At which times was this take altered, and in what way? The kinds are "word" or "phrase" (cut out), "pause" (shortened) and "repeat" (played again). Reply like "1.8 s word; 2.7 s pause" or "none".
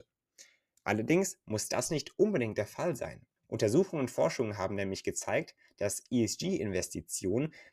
3.4 s pause

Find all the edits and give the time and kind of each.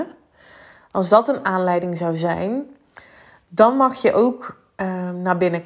none

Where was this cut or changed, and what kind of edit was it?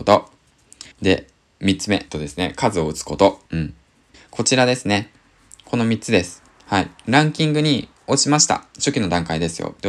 0.9 s pause; 2.1 s phrase; 3.4 s pause; 4.1 s pause

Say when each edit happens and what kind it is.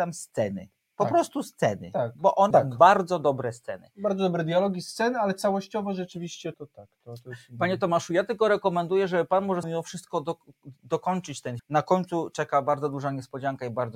2.5 s phrase; 6.5 s word; 9.6 s word; 11.6 s phrase

